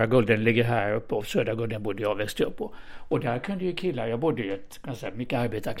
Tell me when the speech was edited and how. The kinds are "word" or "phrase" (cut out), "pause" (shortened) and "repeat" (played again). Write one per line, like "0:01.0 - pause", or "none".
none

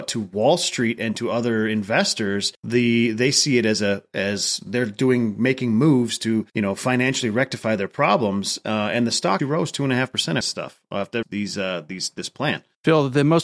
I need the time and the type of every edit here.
0:02.5 - pause
0:06.5 - pause
0:09.4 - word
0:10.4 - phrase
0:11.2 - phrase

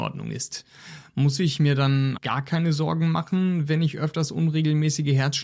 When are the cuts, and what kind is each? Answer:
0:02.2 - word

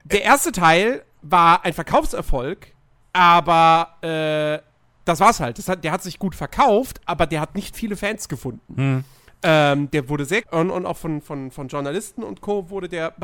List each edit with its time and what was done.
0:03.0 - pause
0:10.4 - phrase

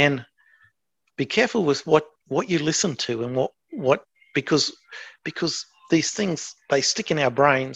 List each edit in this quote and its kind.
none

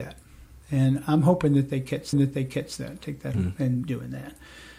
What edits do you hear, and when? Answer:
0:02.1 - repeat
0:03.3 - word
0:03.8 - phrase

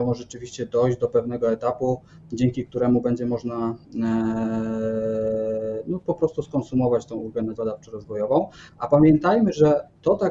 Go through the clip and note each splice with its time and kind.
0:07.5 - word

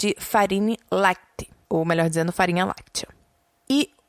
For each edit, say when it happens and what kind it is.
0:01.5 - pause

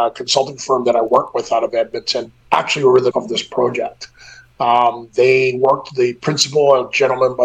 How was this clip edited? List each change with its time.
0:02.4 - pause
0:03.1 - word

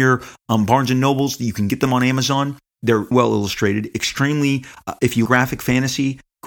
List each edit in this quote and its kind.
0:03.1 - word
0:05.3 - word

